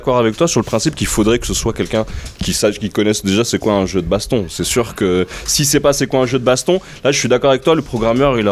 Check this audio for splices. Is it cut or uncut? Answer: uncut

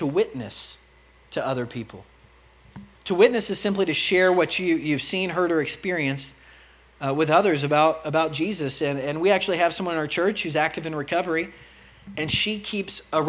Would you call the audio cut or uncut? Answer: uncut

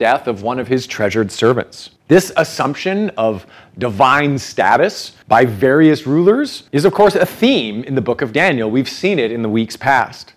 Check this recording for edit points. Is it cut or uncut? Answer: cut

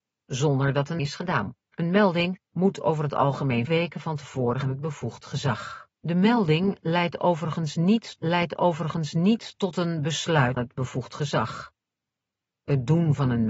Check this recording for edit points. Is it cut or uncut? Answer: cut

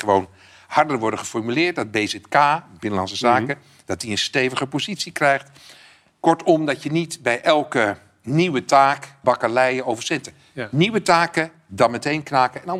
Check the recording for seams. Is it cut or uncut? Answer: cut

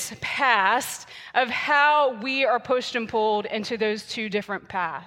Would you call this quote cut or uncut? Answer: uncut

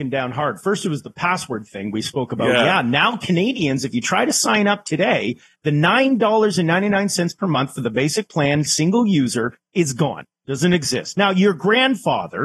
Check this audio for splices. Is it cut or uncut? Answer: uncut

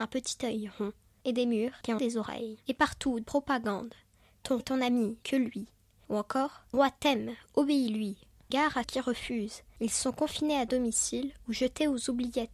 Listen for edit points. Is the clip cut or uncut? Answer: cut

